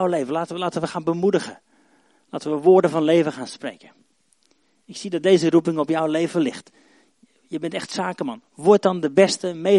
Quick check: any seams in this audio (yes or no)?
no